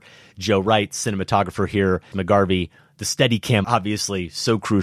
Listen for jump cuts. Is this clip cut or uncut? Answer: cut